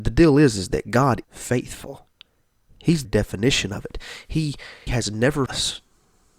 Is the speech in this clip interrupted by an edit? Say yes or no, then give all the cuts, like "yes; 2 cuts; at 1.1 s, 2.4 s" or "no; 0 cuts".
yes; 4 cuts; at 1.2 s, 3.0 s, 4.9 s, 5.5 s